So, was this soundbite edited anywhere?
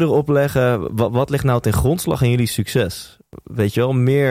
no; 0 cuts

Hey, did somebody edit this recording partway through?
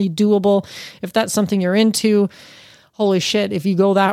no; 0 cuts

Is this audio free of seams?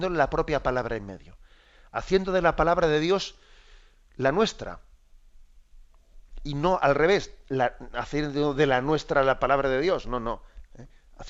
yes; 0 cuts

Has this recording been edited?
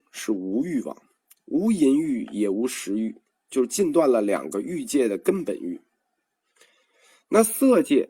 no; 0 cuts

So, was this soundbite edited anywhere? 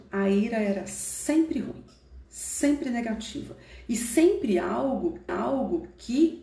yes; 2 cuts; at 2.2 s, 5.3 s

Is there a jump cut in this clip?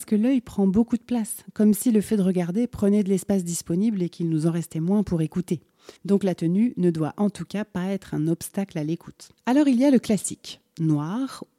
yes; 2 cuts; at 6.0 s, 9.4 s

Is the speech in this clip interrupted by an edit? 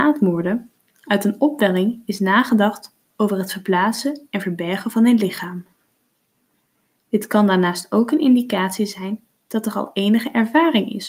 no; 0 cuts

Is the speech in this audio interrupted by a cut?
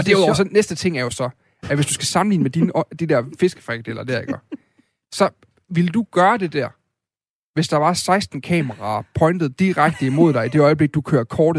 no; 0 cuts

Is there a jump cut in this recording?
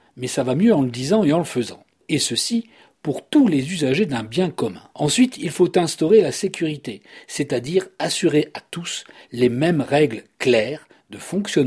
yes; 1 cut; at 4.9 s

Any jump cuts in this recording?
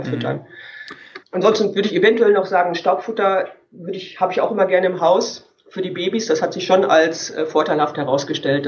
yes; 1 cut; at 1.3 s

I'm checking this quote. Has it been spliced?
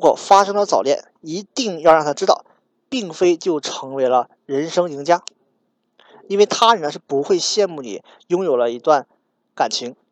no; 0 cuts

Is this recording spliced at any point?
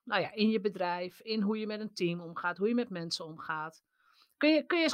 no; 0 cuts

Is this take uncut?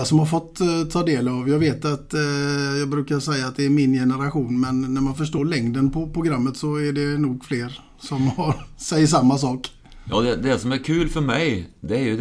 yes; 0 cuts

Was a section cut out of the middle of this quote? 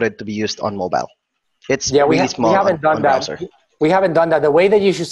no; 0 cuts

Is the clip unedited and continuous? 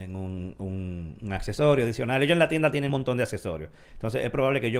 no; 1 cut; at 2.9 s

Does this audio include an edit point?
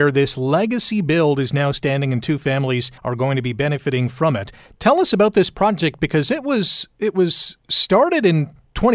yes; 1 cut; at 3.0 s

